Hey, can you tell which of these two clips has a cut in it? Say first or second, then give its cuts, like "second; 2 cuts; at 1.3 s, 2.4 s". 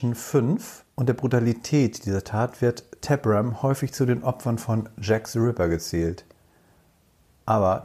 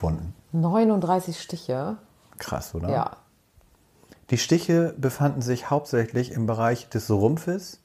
first; 1 cut; at 0.9 s